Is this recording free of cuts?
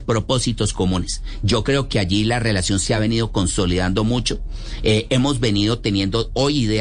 yes; 0 cuts

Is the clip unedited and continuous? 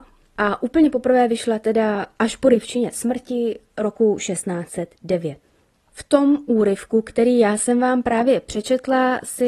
yes; 0 cuts

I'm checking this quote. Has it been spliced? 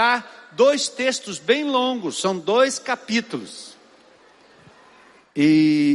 no; 0 cuts

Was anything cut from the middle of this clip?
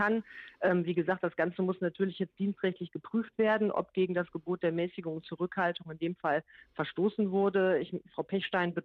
no; 0 cuts

